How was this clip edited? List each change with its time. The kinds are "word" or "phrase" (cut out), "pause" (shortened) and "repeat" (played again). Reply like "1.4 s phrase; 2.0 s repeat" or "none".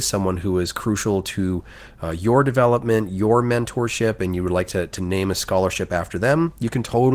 none